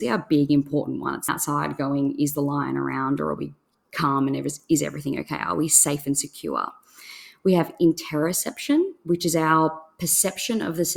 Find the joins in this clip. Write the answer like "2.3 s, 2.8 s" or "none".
1.3 s

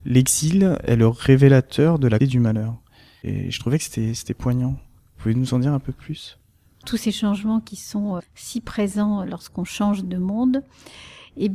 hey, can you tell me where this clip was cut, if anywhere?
2.2 s, 8.2 s, 9.2 s, 10.0 s

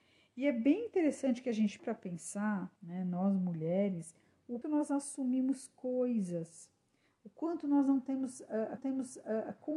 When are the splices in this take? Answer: 1.8 s, 2.8 s, 4.6 s, 8.8 s

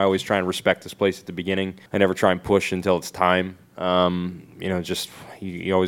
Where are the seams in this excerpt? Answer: 1.9 s

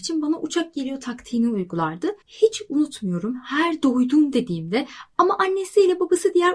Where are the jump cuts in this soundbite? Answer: 2.2 s

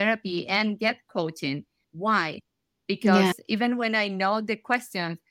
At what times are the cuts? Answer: 1.8 s

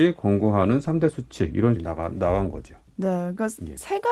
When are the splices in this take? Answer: 1.8 s

